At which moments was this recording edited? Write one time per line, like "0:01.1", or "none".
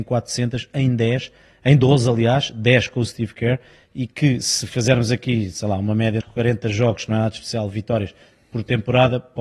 0:06.2